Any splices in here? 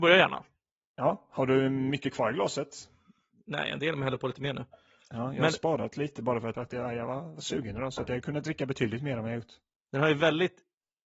yes; 1 cut; at 6.5 s

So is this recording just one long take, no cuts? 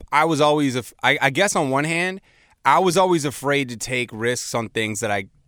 yes; 0 cuts

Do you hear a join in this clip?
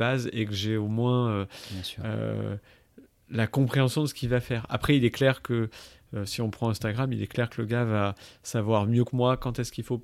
no; 0 cuts

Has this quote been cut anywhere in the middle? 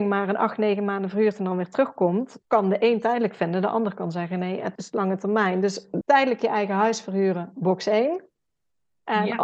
yes; 3 cuts; at 2.4 s, 4.8 s, 6.0 s

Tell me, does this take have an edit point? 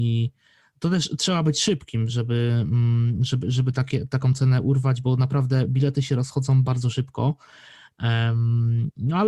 no; 0 cuts

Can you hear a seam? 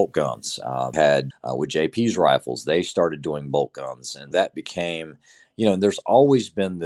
yes; 3 cuts; at 0.9 s, 1.3 s, 4.3 s

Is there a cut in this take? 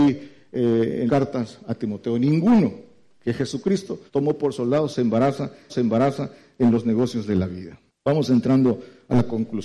yes; 4 cuts; at 1.1 s, 4.1 s, 5.7 s, 7.9 s

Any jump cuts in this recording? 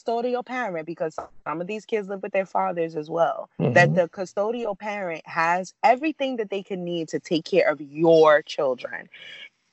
yes; 1 cut; at 3.5 s

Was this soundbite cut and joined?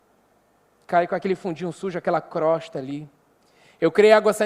no; 0 cuts

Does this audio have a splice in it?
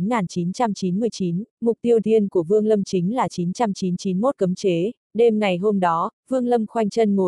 yes; 3 cuts; at 1.5 s, 2.0 s, 5.0 s

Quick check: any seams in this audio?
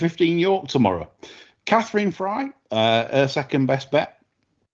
no; 0 cuts

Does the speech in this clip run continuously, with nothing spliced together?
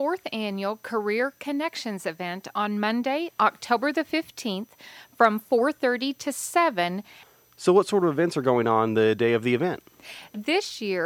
yes; 0 cuts

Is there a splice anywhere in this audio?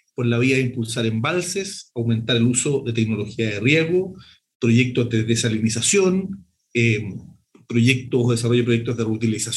no; 0 cuts

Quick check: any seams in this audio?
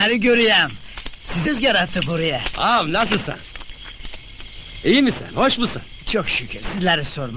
yes; 1 cut; at 1.4 s

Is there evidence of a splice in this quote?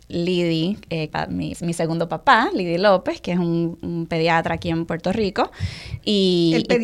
yes; 2 cuts; at 1.1 s, 1.5 s

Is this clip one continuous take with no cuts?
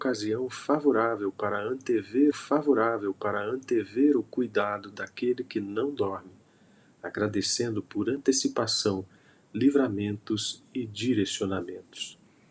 no; 1 cut; at 2.3 s

